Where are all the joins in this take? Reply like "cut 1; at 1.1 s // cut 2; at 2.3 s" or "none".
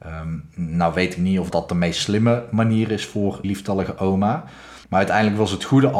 cut 1; at 1.5 s // cut 2; at 3.4 s // cut 3; at 4.8 s